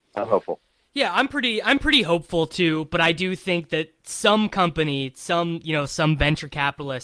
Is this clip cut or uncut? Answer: uncut